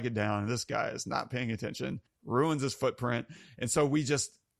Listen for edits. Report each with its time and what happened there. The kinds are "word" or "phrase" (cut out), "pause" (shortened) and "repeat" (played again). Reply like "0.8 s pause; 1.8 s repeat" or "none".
2.1 s pause